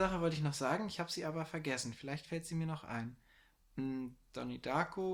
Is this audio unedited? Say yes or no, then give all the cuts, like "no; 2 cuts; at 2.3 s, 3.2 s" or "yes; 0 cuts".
yes; 0 cuts